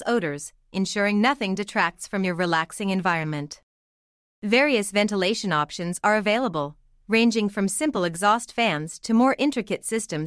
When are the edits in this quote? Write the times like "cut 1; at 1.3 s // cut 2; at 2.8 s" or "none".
none

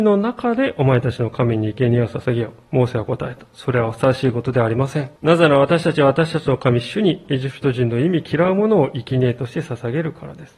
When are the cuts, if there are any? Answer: cut 1; at 5.2 s

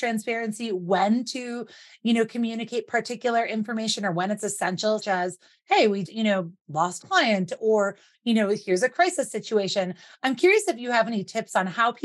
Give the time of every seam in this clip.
cut 1; at 5.0 s // cut 2; at 6.0 s // cut 3; at 7.0 s

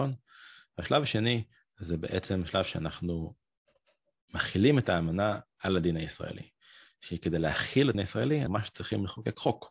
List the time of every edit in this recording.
cut 1; at 7.9 s // cut 2; at 8.5 s

